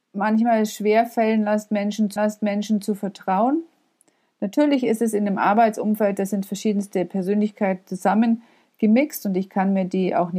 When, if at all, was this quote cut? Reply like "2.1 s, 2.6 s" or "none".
2.2 s